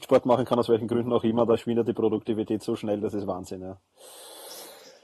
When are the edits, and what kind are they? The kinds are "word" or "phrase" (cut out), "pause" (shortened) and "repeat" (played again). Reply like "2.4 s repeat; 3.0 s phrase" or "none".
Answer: none